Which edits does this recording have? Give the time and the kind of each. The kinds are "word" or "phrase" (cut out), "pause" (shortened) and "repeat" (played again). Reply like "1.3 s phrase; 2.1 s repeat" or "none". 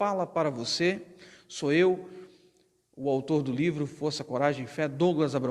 none

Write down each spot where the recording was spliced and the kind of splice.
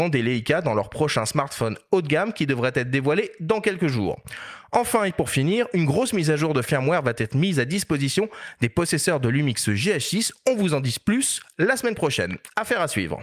none

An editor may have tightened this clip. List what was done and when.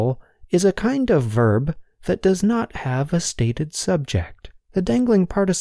4.6 s pause

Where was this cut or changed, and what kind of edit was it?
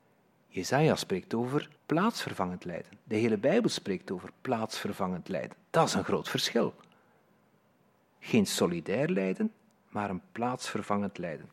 1.8 s pause

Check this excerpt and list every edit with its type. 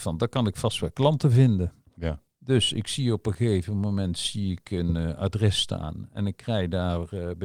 none

